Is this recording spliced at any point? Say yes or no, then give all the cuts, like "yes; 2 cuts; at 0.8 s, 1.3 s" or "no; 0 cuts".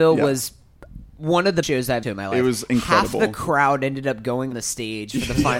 yes; 3 cuts; at 1.6 s, 2.0 s, 4.5 s